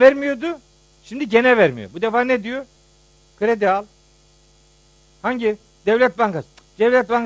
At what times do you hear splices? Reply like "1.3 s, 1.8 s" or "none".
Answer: none